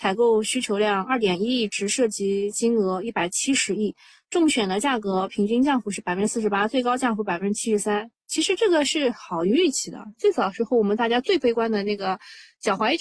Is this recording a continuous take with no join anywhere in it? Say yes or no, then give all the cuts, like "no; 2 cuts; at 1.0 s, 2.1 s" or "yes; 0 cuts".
yes; 0 cuts